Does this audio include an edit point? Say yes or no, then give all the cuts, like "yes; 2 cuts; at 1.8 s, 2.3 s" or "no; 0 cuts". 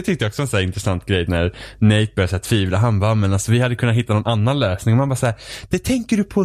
yes; 1 cut; at 1.3 s